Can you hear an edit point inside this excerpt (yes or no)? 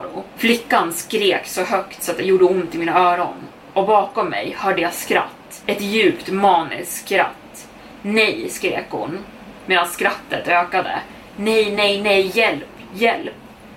no